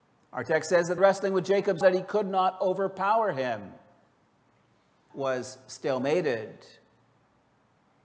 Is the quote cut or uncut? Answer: cut